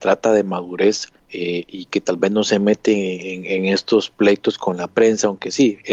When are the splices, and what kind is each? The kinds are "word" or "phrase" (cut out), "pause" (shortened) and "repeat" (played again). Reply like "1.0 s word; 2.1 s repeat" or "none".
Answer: 1.2 s pause

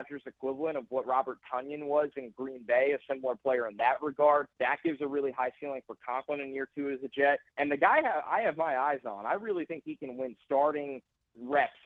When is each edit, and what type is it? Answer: 4.5 s pause; 7.5 s pause

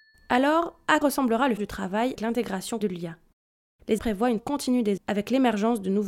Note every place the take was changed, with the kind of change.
1.0 s word; 1.6 s word; 2.2 s word; 2.8 s word; 4.0 s word; 4.4 s word; 5.0 s word

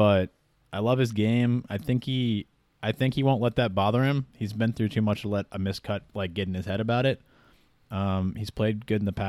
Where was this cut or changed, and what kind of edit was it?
none

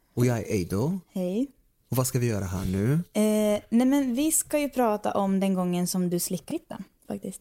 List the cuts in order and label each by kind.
6.5 s word

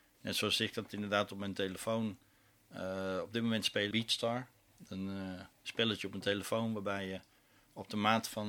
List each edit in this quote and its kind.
3.9 s phrase; 5.5 s pause

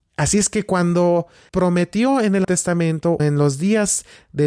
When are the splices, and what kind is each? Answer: 1.5 s word; 2.4 s word; 3.2 s word

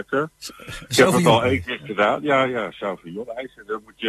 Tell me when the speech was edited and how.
none

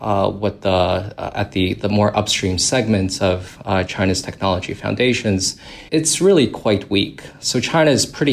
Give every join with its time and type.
5.9 s pause

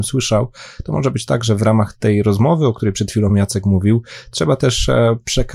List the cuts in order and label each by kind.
none

